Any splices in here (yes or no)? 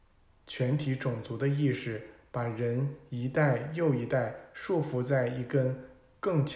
no